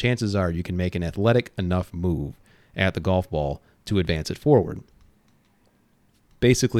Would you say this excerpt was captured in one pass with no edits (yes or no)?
yes